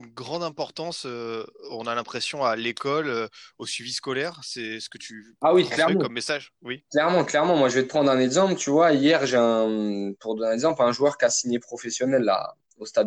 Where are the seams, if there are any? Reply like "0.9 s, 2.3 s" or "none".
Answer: none

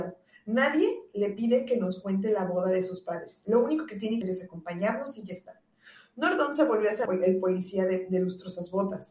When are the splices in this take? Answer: 4.2 s, 7.1 s

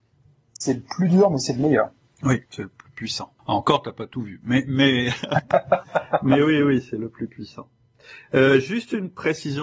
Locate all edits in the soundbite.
2.5 s, 3.4 s

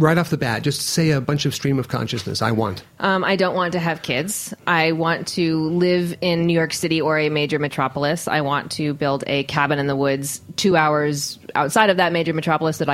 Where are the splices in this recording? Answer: none

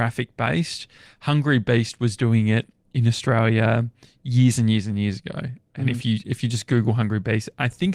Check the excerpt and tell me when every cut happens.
none

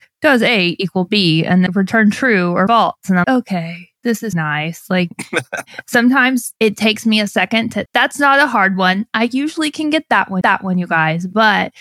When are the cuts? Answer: 1.7 s, 2.7 s, 3.2 s, 4.3 s, 6.6 s, 7.9 s, 10.4 s

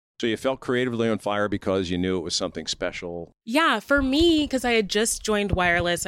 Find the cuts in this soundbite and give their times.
none

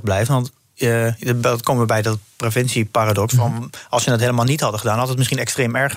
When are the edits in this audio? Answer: none

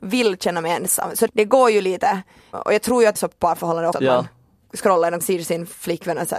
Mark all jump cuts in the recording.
1.3 s, 2.5 s, 3.2 s, 3.9 s, 5.2 s

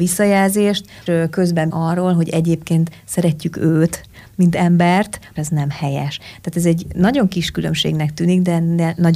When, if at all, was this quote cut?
1.1 s, 1.7 s, 5.4 s

